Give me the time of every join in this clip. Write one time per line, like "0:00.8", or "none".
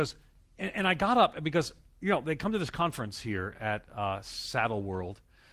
none